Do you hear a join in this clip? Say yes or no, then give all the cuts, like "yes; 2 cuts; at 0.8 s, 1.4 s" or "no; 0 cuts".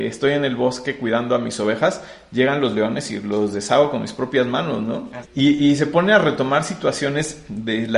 no; 0 cuts